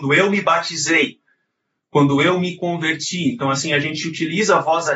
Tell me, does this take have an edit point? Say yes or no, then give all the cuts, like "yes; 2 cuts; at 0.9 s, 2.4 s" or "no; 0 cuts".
no; 0 cuts